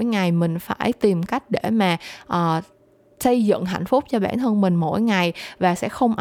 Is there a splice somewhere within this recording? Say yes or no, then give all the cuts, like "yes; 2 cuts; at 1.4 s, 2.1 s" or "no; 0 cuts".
no; 0 cuts